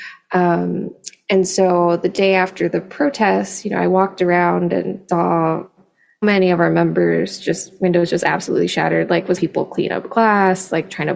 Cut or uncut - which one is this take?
cut